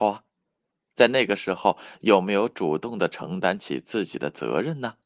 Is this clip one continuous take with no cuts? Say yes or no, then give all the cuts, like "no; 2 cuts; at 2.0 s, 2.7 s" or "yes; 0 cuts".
yes; 0 cuts